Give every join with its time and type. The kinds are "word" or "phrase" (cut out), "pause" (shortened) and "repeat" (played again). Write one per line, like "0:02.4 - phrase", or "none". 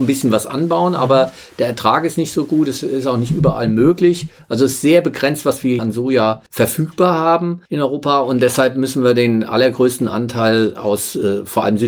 0:05.8 - word
0:06.5 - pause
0:07.7 - pause
0:10.7 - word

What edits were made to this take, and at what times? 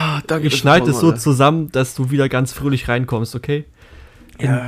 none

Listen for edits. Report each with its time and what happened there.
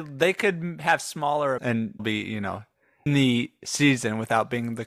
0:01.6 - word
0:02.0 - word
0:03.1 - word

